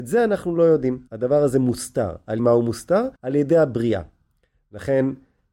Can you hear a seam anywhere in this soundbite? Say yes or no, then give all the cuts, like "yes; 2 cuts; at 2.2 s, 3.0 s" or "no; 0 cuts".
yes; 3 cuts; at 1.1 s, 2.4 s, 3.2 s